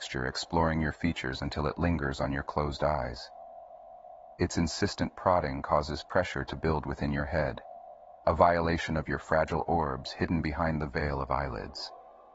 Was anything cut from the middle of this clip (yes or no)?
no